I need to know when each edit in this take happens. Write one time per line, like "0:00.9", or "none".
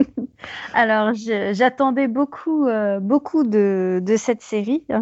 none